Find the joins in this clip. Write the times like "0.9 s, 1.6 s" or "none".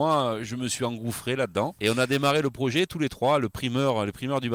none